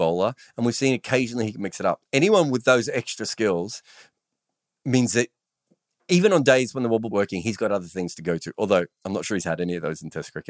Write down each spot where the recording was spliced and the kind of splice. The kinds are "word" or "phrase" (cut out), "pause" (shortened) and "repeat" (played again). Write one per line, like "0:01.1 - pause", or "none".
0:07.1 - phrase